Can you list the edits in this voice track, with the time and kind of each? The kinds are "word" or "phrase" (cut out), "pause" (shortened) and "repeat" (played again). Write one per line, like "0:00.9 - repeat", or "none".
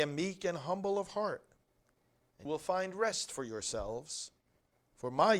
0:02.5 - word